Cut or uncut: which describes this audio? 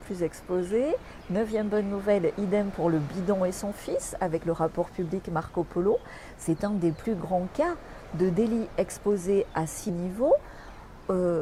cut